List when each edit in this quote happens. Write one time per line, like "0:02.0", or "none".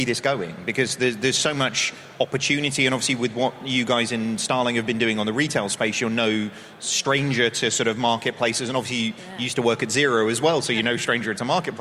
none